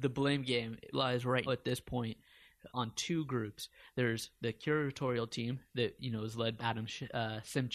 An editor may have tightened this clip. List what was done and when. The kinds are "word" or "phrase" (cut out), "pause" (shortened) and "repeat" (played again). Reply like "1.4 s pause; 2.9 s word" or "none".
0.9 s word; 1.5 s word; 2.7 s word; 6.6 s word